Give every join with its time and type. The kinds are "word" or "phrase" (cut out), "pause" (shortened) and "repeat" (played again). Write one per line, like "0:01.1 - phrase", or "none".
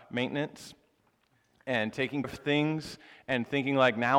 0:02.2 - word